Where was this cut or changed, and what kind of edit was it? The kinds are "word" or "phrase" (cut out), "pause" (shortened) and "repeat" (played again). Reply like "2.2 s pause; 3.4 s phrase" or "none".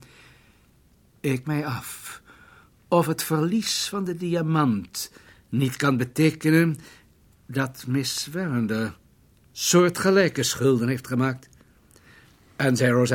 1.4 s word